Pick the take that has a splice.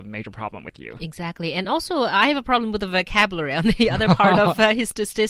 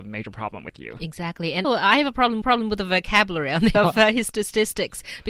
second; 3 cuts; at 1.6 s, 2.4 s, 3.7 s

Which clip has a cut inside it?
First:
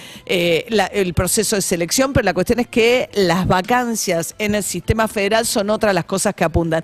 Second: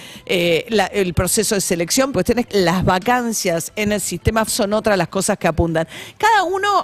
second; 3 cuts; at 2.1 s, 2.5 s, 4.5 s

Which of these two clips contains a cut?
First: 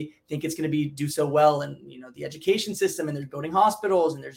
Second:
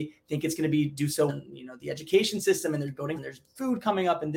second; 2 cuts; at 1.3 s, 3.2 s

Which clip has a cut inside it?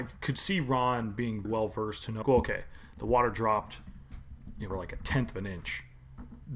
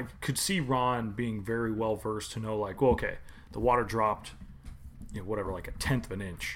first; 3 cuts; at 1.4 s, 2.2 s, 4.7 s

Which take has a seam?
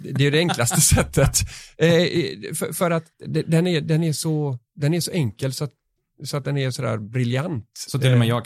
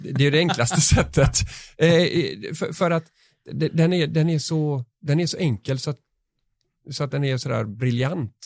first; 2 cuts; at 3.1 s, 6.0 s

